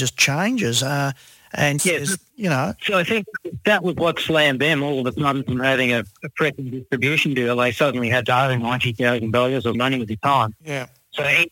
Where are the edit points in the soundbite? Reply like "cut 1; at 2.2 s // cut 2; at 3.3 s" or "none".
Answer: cut 1; at 1.8 s // cut 2; at 9.7 s